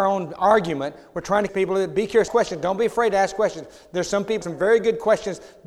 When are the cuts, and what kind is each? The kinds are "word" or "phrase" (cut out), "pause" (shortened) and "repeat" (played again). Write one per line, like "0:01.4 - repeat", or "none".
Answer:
0:01.5 - word
0:02.3 - word
0:04.4 - word